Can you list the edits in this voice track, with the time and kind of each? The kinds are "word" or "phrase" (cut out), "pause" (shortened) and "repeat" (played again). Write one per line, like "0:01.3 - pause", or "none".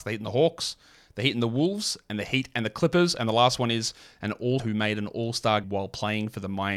0:04.6 - word
0:05.6 - word